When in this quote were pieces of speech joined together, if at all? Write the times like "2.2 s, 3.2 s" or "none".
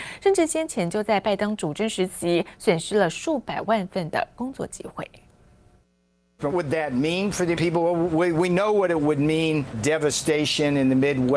6.5 s, 7.6 s, 9.7 s